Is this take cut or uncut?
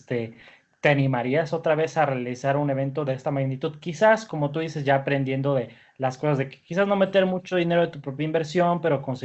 uncut